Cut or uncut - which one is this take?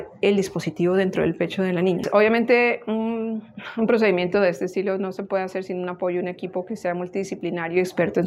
uncut